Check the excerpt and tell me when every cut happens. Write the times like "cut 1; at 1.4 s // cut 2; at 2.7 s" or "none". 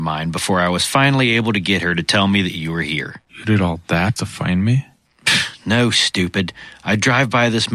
cut 1; at 3.3 s // cut 2; at 4.2 s

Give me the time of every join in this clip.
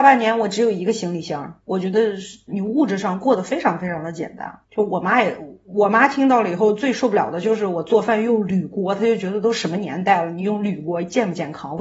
cut 1; at 1.6 s // cut 2; at 2.5 s // cut 3; at 4.6 s

